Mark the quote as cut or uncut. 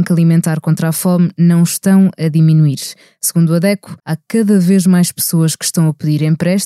cut